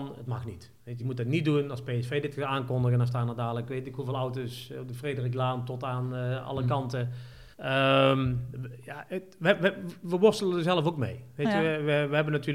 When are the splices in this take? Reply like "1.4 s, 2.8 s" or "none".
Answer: 1.0 s, 7.5 s